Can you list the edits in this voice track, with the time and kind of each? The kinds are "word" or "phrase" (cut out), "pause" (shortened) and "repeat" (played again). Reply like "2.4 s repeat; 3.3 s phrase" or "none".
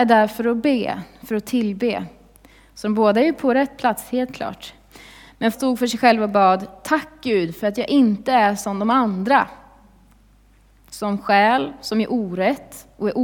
5.5 s word